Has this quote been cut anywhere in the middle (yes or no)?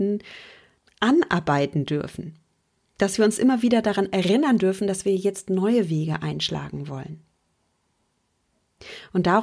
no